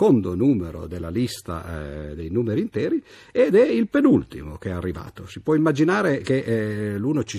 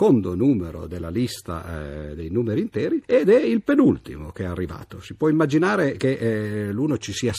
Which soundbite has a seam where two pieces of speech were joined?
second; 1 cut; at 3.0 s

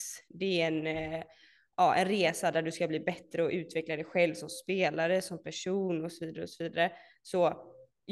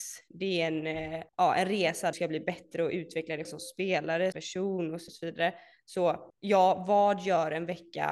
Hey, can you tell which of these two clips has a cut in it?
second; 6 cuts; at 1.3 s, 2.1 s, 3.4 s, 4.3 s, 5.1 s, 6.3 s

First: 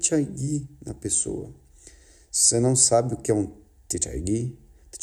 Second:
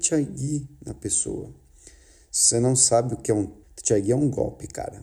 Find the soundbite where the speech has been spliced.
second; 1 cut; at 3.6 s

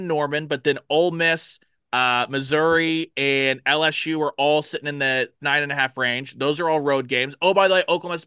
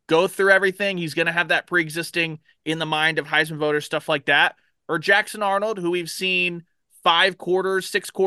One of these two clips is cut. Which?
first; 1 cut; at 5.4 s

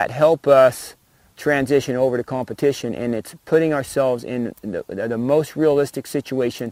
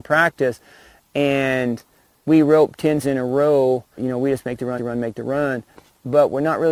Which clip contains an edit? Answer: second; 3 cuts; at 3.0 s, 4.0 s, 4.8 s

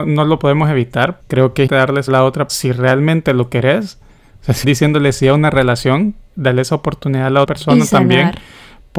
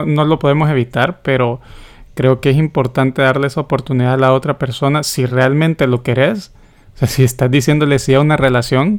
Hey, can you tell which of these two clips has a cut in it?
first; 7 cuts; at 1.2 s, 1.7 s, 2.1 s, 2.5 s, 4.6 s, 6.3 s, 7.4 s

